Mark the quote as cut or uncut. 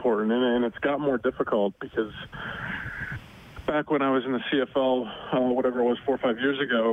uncut